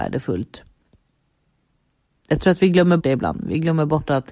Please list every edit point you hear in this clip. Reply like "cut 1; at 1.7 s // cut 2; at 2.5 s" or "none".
cut 1; at 3.0 s